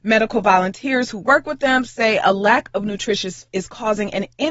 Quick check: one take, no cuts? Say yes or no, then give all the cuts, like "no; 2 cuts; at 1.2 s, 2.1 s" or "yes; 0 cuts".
no; 1 cut; at 3.5 s